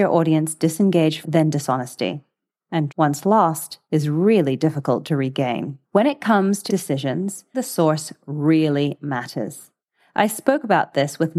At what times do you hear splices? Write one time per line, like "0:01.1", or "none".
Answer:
0:01.2
0:02.9
0:03.8
0:05.8
0:06.7
0:07.5